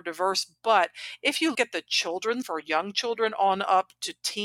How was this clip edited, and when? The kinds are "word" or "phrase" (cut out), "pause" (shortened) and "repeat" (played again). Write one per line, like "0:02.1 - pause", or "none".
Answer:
0:01.5 - word
0:02.4 - word